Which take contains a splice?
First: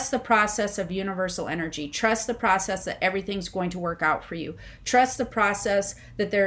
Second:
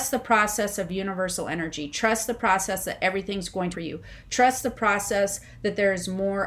second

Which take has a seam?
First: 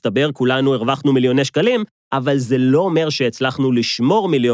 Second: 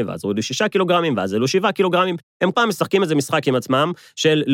second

